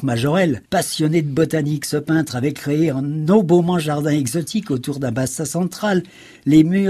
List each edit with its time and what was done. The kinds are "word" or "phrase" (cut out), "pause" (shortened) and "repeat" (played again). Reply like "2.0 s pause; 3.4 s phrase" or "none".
none